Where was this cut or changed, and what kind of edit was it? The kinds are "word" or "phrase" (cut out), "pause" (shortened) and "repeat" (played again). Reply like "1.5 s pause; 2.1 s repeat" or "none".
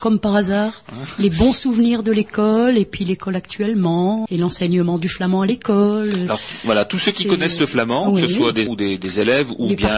4.3 s word; 8.7 s word